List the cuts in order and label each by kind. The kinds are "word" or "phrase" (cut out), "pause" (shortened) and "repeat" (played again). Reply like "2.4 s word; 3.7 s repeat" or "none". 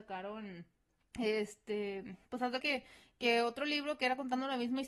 2.3 s pause; 2.6 s word

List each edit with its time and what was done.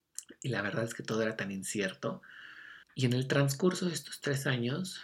2.8 s pause

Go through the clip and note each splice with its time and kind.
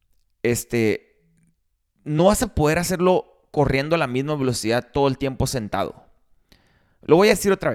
none

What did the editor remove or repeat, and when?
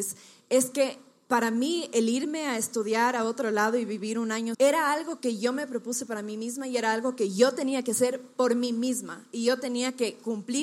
4.5 s word

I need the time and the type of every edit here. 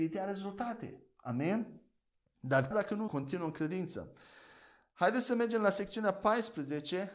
2.7 s word; 3.1 s word

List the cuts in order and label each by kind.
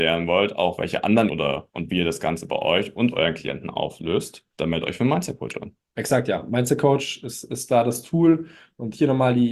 1.3 s word; 1.7 s phrase; 4.5 s pause

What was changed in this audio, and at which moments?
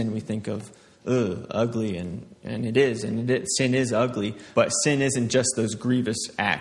2.4 s pause; 4.5 s word

